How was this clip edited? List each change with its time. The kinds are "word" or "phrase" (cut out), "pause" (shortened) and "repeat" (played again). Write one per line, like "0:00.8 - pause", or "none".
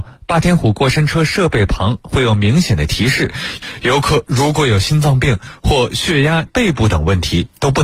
0:06.5 - phrase